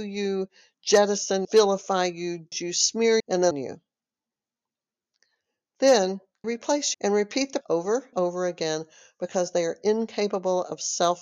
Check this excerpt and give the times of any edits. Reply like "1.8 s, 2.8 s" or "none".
1.4 s, 2.5 s, 3.2 s, 3.5 s, 6.4 s, 6.9 s, 7.6 s, 8.1 s